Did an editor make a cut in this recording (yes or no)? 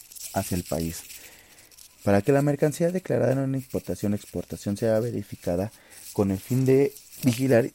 no